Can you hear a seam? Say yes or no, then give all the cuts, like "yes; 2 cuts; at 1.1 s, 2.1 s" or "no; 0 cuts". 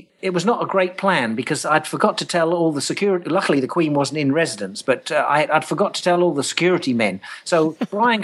no; 0 cuts